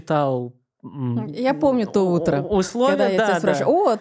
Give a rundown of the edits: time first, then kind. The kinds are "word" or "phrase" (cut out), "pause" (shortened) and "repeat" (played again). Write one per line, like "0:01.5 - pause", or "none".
none